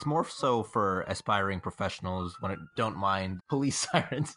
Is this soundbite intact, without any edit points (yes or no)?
no